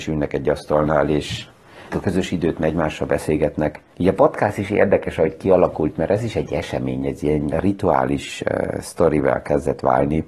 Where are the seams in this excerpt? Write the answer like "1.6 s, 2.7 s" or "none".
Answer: 1.9 s, 3.9 s, 7.5 s